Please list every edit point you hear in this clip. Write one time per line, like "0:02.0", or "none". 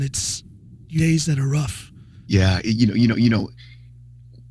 0:01.0
0:02.2
0:03.1